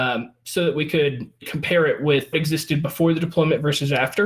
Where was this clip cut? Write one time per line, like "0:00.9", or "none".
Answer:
0:01.4
0:02.3